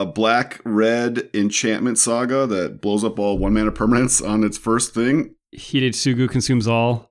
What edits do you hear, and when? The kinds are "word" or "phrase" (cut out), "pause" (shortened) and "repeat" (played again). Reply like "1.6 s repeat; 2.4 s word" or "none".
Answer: none